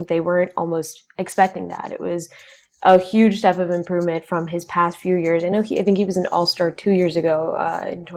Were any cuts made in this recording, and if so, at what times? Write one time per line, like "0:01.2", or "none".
none